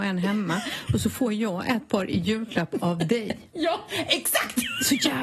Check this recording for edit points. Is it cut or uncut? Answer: uncut